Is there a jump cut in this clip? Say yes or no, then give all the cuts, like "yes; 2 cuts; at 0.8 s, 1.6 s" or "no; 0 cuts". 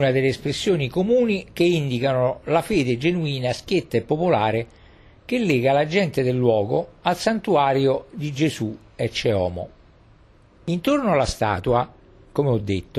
no; 0 cuts